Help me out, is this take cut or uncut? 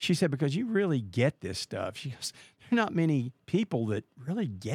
uncut